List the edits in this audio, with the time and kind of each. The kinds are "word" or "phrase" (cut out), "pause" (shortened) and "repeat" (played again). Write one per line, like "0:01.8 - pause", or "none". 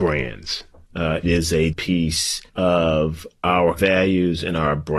0:01.2 - word
0:01.7 - word
0:02.5 - pause
0:03.8 - word